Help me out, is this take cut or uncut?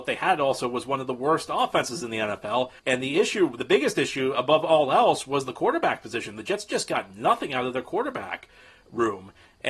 cut